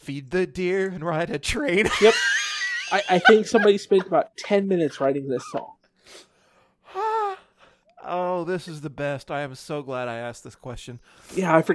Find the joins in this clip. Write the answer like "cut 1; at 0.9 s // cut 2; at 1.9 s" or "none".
none